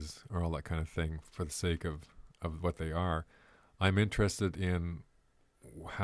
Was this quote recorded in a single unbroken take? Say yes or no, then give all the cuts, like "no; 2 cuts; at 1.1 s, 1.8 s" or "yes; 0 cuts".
yes; 0 cuts